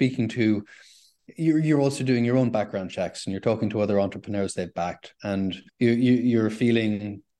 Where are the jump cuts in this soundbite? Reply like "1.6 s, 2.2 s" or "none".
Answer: 5.7 s

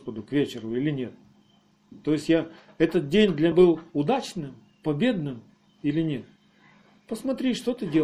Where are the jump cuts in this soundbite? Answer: 3.5 s

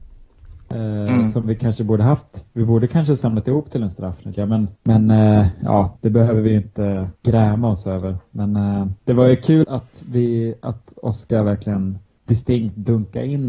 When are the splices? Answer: 4.3 s, 4.8 s, 6.0 s, 7.2 s, 9.0 s, 9.6 s, 12.1 s

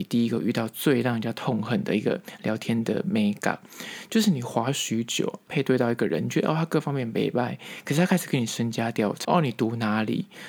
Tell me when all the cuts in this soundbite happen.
5.5 s, 9.2 s

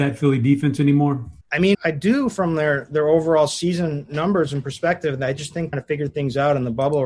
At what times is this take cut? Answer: 1.4 s, 1.7 s, 5.7 s

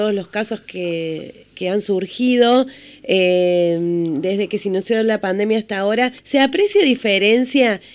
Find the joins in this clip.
6.2 s

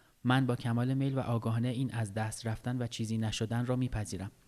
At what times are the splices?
none

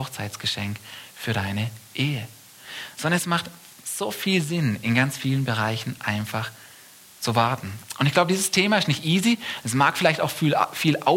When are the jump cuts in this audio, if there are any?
none

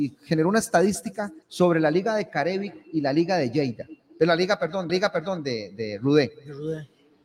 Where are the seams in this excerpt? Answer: 1.4 s, 4.9 s

